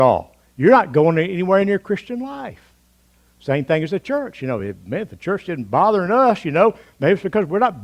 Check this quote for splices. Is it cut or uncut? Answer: uncut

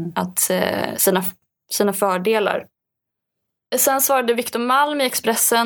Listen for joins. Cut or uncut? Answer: uncut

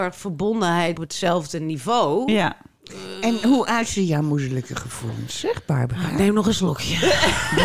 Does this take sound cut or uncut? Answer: cut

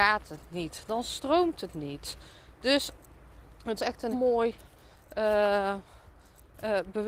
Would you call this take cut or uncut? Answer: cut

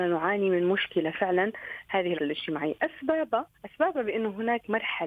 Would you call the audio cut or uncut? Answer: cut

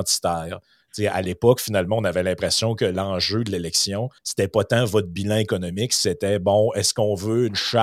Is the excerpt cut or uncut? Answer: cut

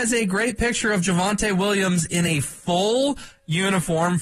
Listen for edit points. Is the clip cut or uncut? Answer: uncut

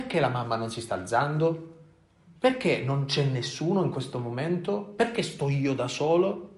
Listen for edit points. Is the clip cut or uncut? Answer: uncut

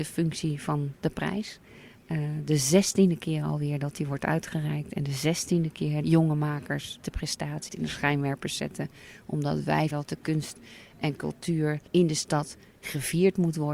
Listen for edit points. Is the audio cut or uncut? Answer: cut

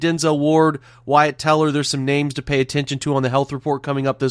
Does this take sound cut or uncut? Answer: uncut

